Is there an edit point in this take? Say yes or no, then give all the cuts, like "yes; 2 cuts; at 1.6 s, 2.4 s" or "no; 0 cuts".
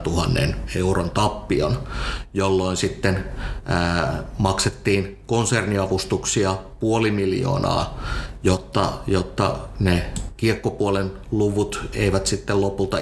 no; 0 cuts